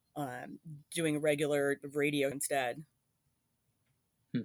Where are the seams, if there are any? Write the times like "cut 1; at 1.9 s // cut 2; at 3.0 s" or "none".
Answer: cut 1; at 1.8 s // cut 2; at 2.3 s